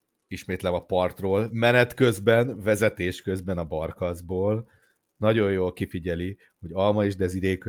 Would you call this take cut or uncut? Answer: uncut